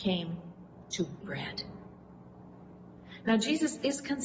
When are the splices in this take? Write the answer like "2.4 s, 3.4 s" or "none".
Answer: 1.2 s